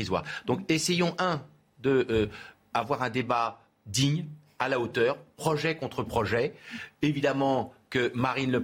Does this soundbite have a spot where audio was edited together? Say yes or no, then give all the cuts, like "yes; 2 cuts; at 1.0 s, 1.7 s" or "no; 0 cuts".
no; 0 cuts